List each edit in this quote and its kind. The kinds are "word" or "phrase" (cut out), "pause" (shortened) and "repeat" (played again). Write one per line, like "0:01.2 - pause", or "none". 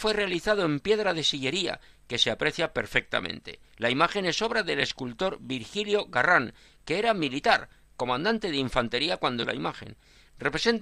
0:03.7 - pause
0:09.4 - word